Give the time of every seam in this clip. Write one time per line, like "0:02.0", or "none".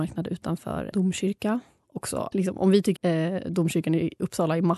0:00.9
0:02.3
0:03.0